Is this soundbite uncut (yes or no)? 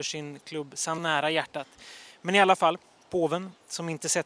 no